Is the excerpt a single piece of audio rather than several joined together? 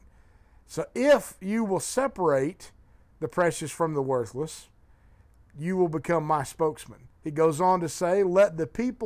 no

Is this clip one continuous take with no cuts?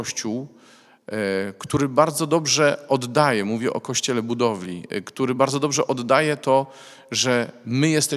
yes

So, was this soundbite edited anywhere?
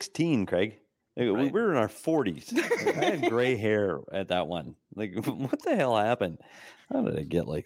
no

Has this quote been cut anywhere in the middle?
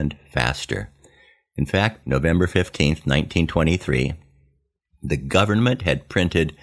yes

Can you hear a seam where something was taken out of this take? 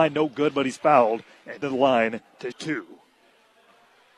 yes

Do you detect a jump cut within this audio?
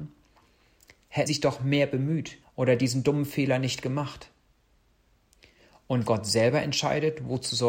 yes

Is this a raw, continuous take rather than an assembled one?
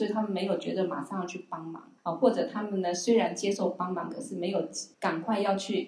no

